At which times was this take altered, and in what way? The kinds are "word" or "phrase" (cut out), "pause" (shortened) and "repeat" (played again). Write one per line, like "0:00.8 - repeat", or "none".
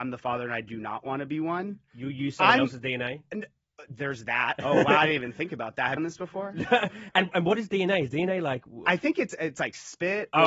0:06.0 - phrase